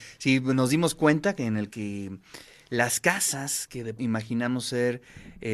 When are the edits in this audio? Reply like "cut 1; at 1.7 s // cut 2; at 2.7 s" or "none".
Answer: cut 1; at 1.7 s // cut 2; at 4.0 s